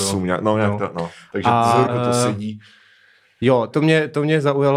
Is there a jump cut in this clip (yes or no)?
yes